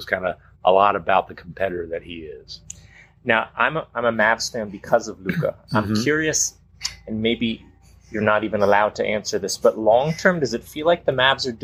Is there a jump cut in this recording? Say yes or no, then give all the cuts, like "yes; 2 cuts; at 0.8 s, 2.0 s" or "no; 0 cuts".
no; 0 cuts